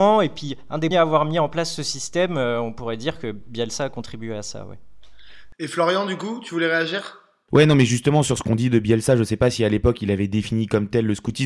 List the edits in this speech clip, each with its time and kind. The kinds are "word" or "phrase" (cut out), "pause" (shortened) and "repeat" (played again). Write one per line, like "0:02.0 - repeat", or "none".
0:00.9 - word